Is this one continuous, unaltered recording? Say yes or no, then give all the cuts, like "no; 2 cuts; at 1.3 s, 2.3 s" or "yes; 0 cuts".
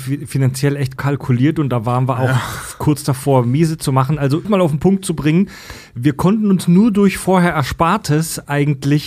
no; 2 cuts; at 1.0 s, 4.4 s